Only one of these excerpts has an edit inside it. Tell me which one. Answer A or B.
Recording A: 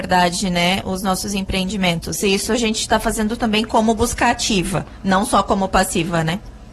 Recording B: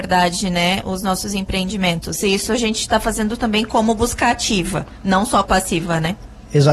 B